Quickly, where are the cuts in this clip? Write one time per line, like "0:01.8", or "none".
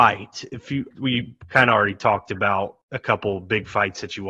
0:00.9
0:02.8